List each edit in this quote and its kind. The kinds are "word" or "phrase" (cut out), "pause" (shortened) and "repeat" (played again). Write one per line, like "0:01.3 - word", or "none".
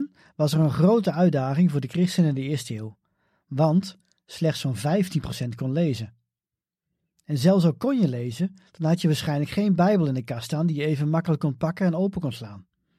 none